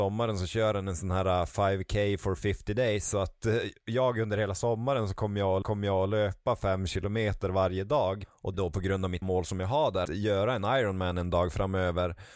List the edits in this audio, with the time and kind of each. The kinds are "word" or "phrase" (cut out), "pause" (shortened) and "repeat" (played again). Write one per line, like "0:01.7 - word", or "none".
0:05.6 - repeat
0:08.5 - phrase
0:09.2 - word
0:10.0 - word